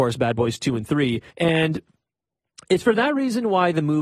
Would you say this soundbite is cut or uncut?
cut